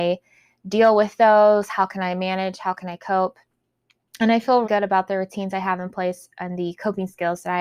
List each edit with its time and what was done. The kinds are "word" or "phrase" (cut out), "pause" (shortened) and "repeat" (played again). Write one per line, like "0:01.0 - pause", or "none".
0:04.6 - word

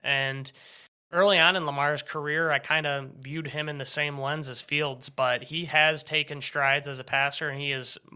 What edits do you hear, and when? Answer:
none

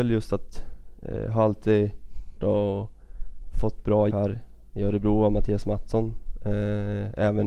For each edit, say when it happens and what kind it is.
0:02.4 - phrase
0:04.1 - word

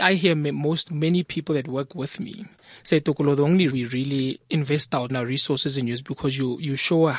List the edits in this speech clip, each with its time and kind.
0:03.7 - word
0:05.1 - word

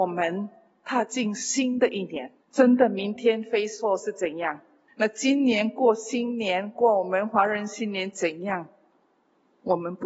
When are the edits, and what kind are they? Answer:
0:02.4 - pause
0:04.9 - pause

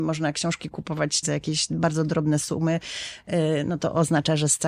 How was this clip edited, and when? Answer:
0:01.2 - word

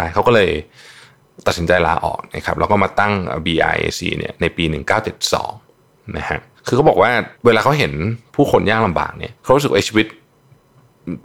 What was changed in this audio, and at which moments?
0:06.6 - pause
0:07.3 - pause
0:09.4 - pause

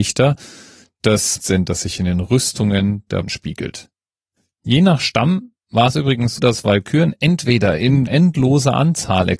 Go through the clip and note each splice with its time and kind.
0:01.4 - word
0:03.2 - word
0:06.4 - word
0:08.1 - word

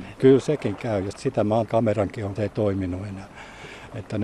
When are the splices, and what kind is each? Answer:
0:01.1 - word
0:01.7 - phrase
0:02.4 - phrase

